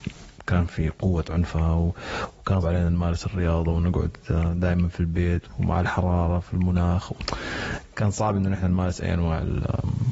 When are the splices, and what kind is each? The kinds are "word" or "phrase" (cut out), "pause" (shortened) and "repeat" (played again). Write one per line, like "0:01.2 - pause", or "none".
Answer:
0:02.6 - word